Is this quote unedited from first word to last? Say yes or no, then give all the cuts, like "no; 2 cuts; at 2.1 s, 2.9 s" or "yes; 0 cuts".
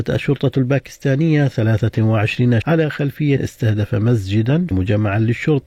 no; 3 cuts; at 2.6 s, 3.4 s, 4.7 s